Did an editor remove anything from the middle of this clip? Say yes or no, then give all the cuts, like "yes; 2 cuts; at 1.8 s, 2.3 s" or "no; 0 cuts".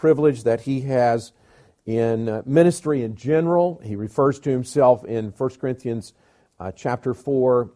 no; 0 cuts